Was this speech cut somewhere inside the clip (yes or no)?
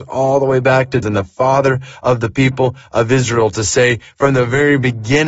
yes